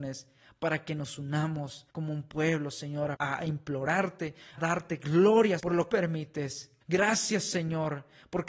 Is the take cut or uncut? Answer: cut